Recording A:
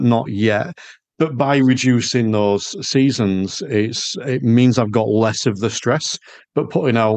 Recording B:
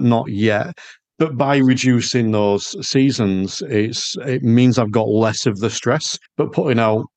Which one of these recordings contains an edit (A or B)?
B